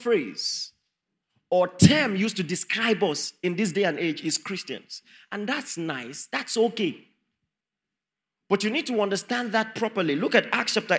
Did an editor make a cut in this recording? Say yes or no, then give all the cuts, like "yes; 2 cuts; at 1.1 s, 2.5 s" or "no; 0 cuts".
no; 0 cuts